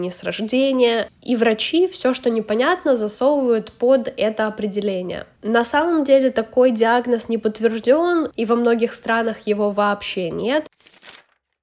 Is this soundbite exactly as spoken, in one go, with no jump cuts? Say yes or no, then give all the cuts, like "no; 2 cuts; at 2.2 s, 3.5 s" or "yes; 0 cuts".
no; 1 cut; at 5.4 s